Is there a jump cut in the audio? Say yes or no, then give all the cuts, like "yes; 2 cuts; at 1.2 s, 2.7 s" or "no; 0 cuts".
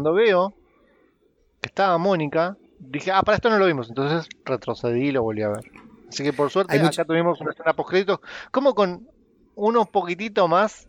yes; 1 cut; at 2.7 s